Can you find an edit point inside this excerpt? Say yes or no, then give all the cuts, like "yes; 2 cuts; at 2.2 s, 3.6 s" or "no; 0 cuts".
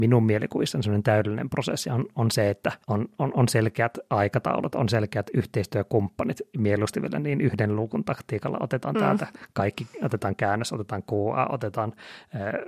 yes; 1 cut; at 2.8 s